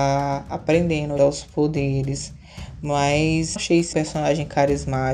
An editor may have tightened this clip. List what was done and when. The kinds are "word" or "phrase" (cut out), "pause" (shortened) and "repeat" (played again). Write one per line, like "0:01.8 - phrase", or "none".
0:01.2 - word
0:03.6 - word
0:03.9 - word